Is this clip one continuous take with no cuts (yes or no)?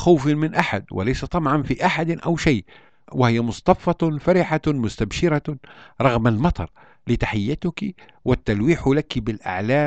yes